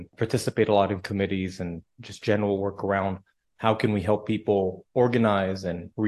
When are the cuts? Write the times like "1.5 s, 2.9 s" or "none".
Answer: none

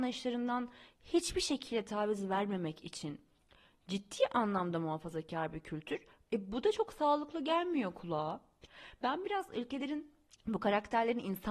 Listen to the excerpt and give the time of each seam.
none

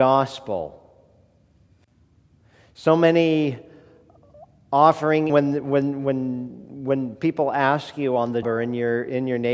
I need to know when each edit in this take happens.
5.3 s, 8.4 s

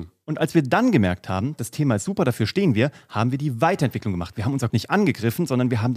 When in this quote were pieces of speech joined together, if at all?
4.7 s

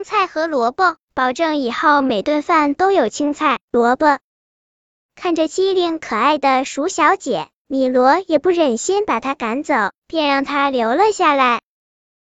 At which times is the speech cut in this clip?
4.3 s

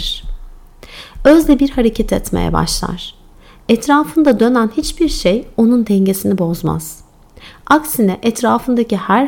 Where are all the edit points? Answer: none

